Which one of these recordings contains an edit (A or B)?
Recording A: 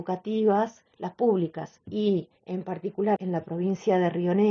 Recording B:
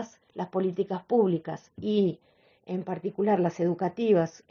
A